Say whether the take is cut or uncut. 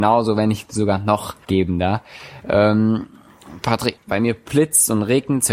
cut